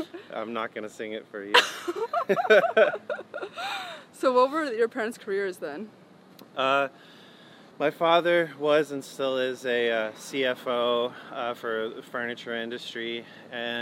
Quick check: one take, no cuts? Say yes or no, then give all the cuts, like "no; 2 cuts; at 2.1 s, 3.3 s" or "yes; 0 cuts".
no; 1 cut; at 7.7 s